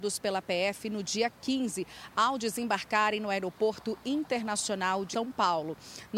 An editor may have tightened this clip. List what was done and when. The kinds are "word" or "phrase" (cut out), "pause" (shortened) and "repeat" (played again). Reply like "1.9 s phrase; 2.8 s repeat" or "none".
5.1 s word